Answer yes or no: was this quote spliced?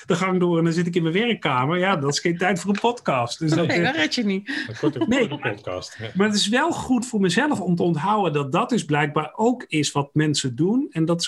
no